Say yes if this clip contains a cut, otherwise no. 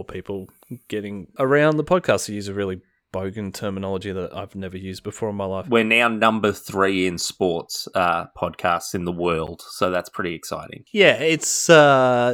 no